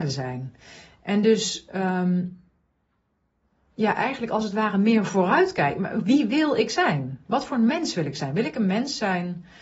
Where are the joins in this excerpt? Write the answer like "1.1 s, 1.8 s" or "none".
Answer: none